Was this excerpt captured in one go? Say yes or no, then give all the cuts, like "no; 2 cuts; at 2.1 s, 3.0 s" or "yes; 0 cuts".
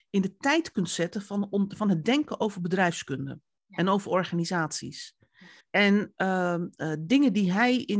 no; 1 cut; at 5.6 s